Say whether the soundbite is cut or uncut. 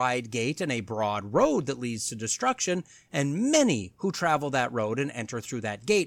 uncut